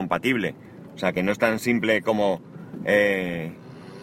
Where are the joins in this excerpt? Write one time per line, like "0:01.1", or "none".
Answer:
none